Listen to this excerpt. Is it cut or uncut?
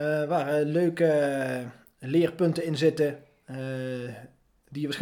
uncut